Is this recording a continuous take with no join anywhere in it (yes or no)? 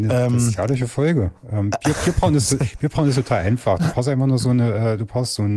yes